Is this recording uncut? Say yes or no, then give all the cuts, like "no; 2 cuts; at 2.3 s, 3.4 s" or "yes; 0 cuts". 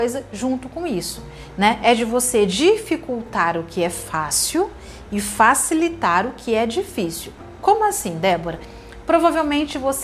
yes; 0 cuts